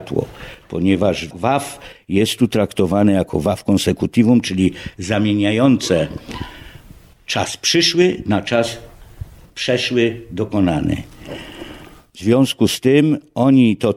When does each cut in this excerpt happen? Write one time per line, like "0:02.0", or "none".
none